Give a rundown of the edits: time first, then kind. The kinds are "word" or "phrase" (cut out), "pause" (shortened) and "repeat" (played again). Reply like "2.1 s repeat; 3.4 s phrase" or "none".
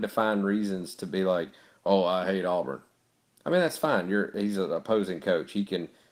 none